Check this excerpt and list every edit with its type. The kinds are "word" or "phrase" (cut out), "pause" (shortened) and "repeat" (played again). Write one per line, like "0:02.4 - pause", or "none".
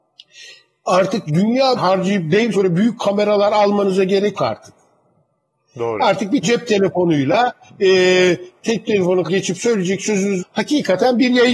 0:01.3 - word
0:01.8 - word
0:02.5 - word
0:04.4 - word
0:06.4 - word
0:09.3 - word
0:10.4 - word

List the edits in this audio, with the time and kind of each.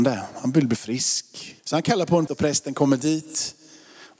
0:01.6 - pause
0:02.3 - word

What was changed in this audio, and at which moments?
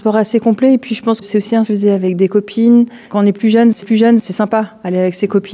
0:01.2 - word
0:01.6 - phrase
0:03.1 - pause
0:03.8 - repeat

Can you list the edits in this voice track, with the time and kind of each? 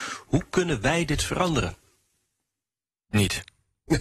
none

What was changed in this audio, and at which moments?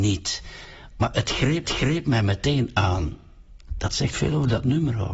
0:01.6 - repeat

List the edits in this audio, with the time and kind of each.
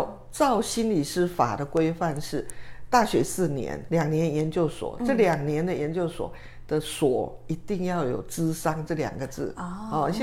0:03.9 - word

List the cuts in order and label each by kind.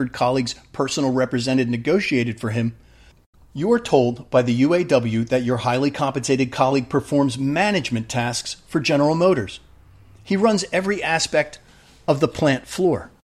none

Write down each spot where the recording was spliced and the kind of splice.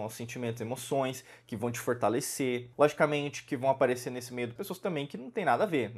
0:02.7 - pause
0:04.6 - word

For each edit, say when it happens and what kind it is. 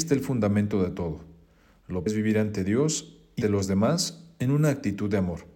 0:02.1 - word
0:03.4 - word

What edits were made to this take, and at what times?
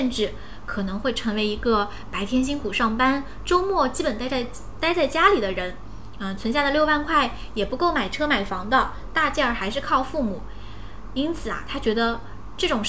none

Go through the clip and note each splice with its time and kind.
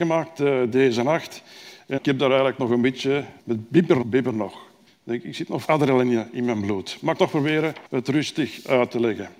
0:02.0 - word
0:03.4 - pause
0:04.0 - word
0:04.9 - pause
0:05.6 - word
0:07.2 - word
0:07.9 - pause

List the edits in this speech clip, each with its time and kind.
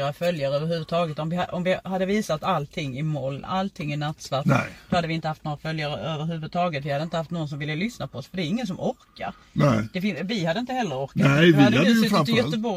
none

